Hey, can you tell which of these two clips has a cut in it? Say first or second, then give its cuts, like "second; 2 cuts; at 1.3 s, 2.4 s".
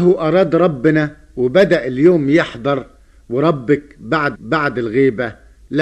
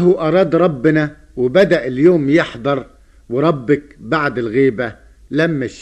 first; 1 cut; at 4.3 s